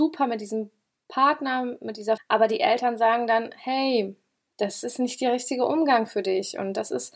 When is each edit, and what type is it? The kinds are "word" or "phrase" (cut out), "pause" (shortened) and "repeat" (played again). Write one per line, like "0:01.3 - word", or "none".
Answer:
0:02.2 - word